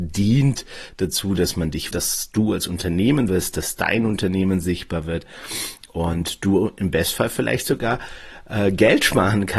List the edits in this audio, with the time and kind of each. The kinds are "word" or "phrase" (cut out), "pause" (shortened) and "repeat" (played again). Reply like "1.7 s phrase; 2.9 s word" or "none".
1.9 s word; 3.3 s word